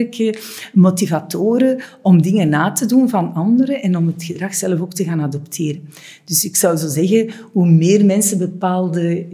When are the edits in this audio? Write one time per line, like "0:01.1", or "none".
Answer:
none